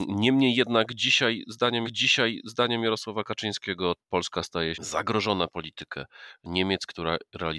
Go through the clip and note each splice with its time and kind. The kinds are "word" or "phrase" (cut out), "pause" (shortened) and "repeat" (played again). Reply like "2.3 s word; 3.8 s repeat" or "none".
1.8 s repeat; 4.0 s pause; 4.7 s word; 5.5 s word